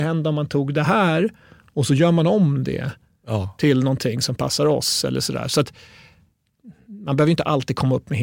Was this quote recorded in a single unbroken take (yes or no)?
yes